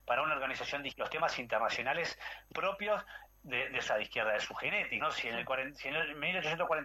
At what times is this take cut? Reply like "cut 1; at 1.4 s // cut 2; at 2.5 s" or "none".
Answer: cut 1; at 0.9 s // cut 2; at 2.5 s // cut 3; at 3.3 s // cut 4; at 3.9 s // cut 5; at 5.0 s